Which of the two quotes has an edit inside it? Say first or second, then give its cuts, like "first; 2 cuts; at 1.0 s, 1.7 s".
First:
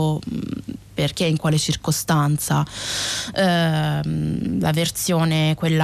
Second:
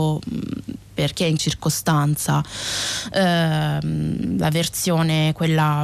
second; 1 cut; at 1.4 s